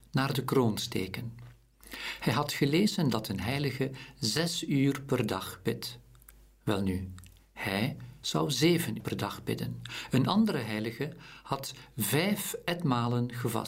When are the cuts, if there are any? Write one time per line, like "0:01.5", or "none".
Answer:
0:09.0